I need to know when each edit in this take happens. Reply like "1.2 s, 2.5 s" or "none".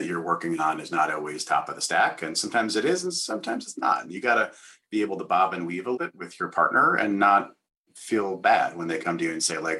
6.0 s